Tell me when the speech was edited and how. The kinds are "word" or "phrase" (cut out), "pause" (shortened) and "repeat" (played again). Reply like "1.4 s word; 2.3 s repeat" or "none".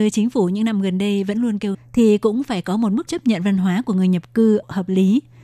1.7 s word; 3.1 s word